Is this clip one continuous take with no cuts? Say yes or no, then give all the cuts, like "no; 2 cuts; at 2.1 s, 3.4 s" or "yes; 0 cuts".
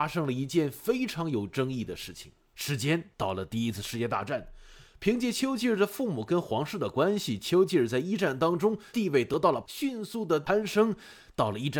yes; 0 cuts